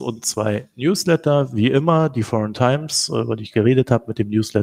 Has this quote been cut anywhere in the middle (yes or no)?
yes